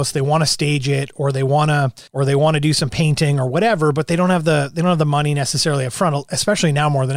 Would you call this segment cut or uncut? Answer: cut